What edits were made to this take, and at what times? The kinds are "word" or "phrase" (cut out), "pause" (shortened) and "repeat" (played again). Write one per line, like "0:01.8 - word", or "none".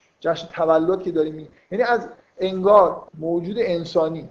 0:03.1 - pause